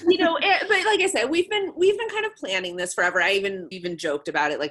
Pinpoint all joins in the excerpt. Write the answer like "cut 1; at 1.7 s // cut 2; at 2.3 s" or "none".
cut 1; at 3.7 s